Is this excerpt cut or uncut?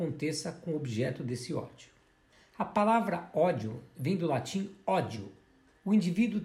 cut